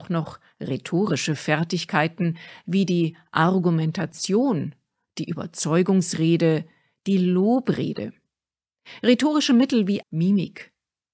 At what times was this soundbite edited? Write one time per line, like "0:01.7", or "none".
0:10.0